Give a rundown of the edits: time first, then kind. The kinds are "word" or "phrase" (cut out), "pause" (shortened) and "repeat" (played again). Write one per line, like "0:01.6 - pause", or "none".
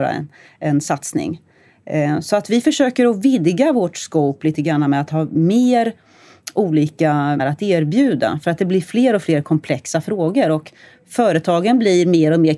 0:07.4 - phrase